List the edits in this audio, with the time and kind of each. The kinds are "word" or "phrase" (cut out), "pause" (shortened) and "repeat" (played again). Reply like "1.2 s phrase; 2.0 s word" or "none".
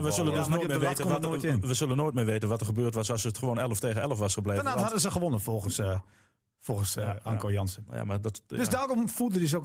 none